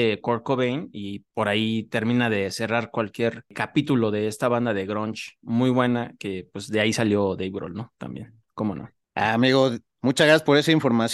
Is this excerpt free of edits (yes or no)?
yes